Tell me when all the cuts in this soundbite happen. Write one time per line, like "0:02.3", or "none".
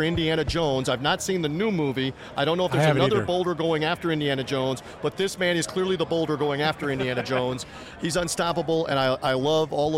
none